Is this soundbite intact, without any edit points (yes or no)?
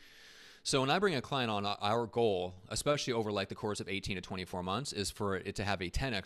yes